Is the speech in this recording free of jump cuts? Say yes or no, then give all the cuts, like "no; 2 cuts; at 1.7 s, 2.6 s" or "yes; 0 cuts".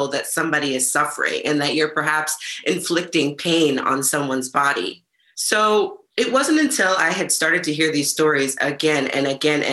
yes; 0 cuts